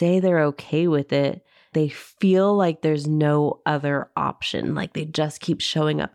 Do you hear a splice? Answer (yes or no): yes